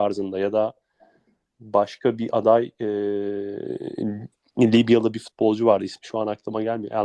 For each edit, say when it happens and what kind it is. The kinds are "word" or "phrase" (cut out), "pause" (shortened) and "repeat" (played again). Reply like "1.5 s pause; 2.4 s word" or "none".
none